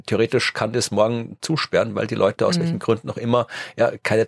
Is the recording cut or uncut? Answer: uncut